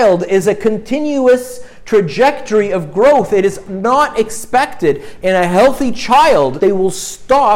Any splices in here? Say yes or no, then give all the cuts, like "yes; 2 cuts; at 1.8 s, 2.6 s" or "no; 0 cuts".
yes; 1 cut; at 6.6 s